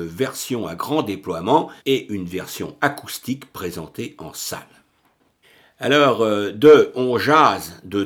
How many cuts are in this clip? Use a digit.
2